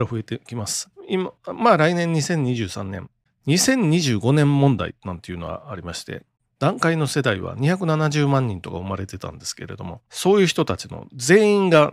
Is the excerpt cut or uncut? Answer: cut